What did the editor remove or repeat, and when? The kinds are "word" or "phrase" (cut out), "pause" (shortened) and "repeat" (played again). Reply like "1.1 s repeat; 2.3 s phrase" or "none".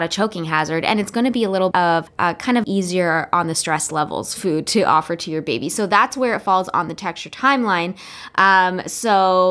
1.7 s word; 2.1 s word; 2.6 s word